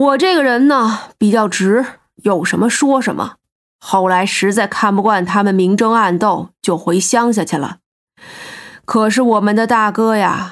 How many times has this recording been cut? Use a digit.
0